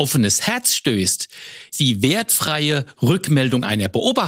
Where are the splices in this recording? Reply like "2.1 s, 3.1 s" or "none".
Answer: 1.7 s